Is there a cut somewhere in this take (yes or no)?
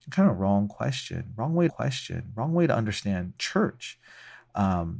yes